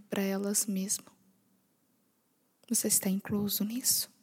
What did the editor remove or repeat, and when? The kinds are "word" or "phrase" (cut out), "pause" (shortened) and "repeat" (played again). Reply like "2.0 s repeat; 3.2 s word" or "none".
none

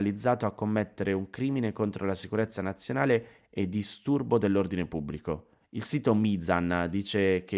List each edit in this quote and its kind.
5.6 s pause

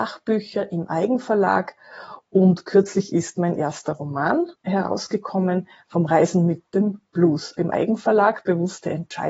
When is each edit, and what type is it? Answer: 4.5 s pause; 7.6 s word

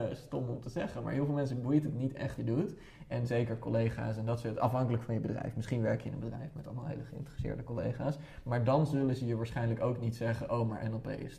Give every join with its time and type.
2.4 s word; 3.2 s word

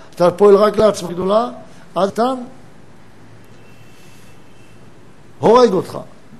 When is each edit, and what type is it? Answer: 1.1 s word; 2.1 s word

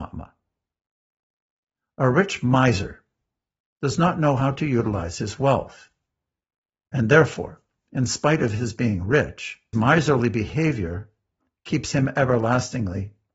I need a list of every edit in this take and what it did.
9.7 s word

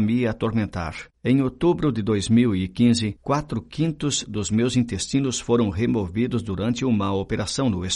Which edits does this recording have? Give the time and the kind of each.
1.1 s pause

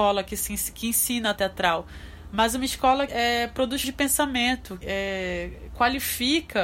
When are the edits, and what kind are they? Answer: 1.4 s word; 3.1 s word; 3.8 s word; 4.8 s word

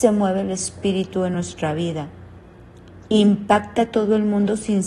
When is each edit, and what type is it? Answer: none

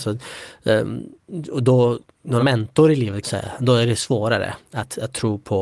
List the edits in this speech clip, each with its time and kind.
2.4 s word; 3.2 s phrase

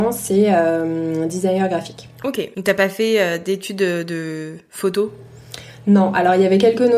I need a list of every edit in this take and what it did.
2.5 s pause

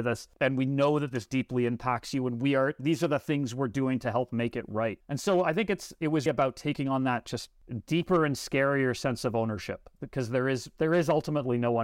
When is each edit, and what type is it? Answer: 6.3 s word

